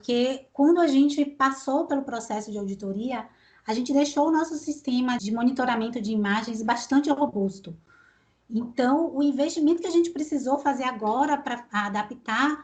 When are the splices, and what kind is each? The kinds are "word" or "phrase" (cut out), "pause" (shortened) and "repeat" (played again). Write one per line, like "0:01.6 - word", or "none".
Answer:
0:05.2 - word